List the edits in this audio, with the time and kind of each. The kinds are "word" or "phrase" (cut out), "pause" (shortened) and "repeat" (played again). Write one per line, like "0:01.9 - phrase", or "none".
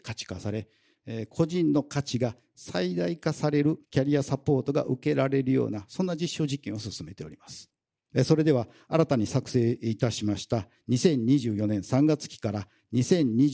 0:03.8 - pause